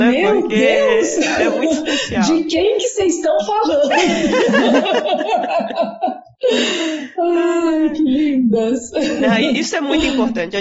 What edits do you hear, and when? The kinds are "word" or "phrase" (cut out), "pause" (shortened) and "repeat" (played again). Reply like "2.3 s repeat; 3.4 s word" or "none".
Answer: none